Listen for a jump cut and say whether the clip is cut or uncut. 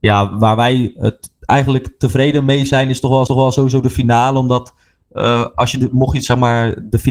cut